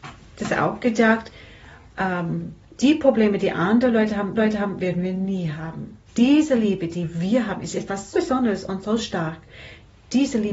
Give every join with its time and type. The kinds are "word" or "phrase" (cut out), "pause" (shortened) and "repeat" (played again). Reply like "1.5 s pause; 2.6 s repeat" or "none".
4.3 s repeat; 6.1 s pause; 8.1 s word